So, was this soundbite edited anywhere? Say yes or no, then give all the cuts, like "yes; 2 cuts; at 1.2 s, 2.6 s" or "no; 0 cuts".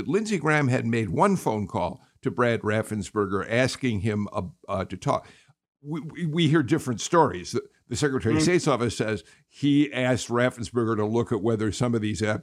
no; 0 cuts